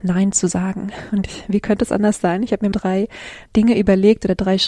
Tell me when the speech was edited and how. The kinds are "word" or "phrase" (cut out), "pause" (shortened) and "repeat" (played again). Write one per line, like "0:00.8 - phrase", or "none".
0:02.7 - word
0:03.5 - word